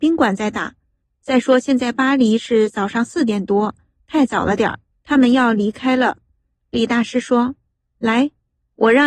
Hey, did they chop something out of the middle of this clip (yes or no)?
yes